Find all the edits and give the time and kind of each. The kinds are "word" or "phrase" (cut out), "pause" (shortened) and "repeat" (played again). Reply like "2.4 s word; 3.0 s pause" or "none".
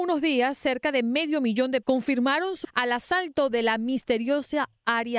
1.8 s word; 2.6 s word